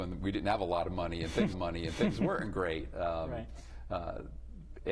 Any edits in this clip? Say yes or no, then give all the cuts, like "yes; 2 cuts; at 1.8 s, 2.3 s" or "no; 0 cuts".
yes; 1 cut; at 1.5 s